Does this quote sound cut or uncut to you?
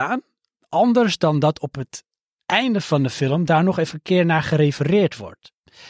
uncut